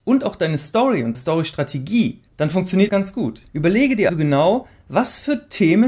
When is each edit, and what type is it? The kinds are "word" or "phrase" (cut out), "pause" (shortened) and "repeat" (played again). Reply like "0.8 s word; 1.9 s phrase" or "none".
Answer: 1.1 s word; 2.3 s pause; 2.9 s word; 3.5 s pause; 4.1 s word